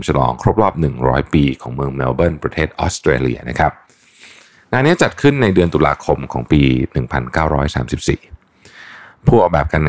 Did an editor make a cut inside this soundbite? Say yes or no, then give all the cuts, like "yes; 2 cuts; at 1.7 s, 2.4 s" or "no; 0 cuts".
no; 0 cuts